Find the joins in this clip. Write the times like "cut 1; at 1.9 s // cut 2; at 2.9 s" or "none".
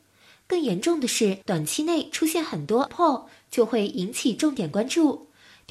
cut 1; at 1.4 s // cut 2; at 2.9 s